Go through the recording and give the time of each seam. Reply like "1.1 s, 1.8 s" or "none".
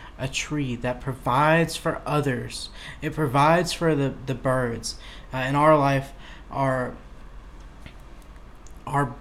none